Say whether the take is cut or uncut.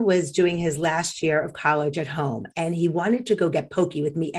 uncut